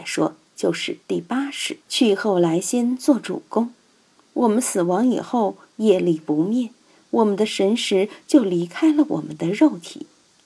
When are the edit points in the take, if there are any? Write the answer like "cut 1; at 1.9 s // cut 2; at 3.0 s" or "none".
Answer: cut 1; at 1.0 s // cut 2; at 1.8 s